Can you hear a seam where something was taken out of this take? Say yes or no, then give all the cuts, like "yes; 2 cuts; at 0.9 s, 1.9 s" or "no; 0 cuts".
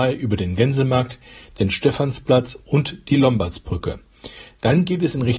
no; 0 cuts